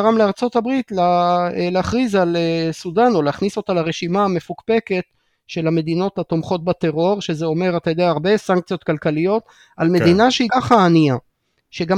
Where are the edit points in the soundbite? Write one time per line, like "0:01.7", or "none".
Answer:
0:10.5